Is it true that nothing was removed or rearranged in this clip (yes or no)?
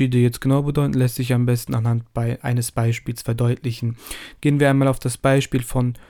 yes